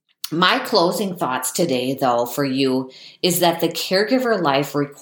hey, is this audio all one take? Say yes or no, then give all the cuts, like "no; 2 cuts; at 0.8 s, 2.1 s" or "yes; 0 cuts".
yes; 0 cuts